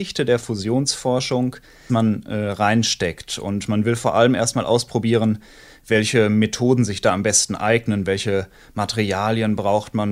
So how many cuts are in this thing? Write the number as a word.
one